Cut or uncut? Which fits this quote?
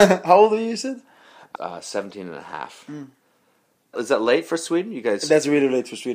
cut